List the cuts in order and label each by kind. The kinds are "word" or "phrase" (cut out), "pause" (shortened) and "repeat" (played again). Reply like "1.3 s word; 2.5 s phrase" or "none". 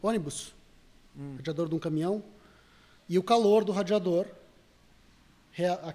none